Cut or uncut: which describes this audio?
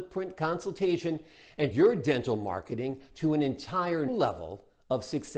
cut